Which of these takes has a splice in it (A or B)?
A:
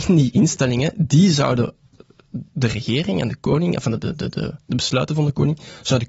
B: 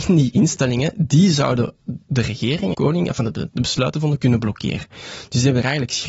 B